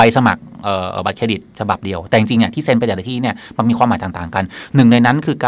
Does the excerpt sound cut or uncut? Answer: uncut